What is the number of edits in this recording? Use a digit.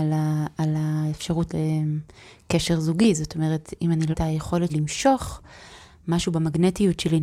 3